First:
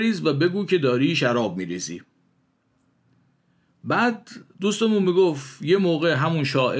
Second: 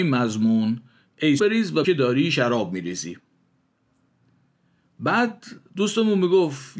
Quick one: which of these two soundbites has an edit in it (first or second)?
second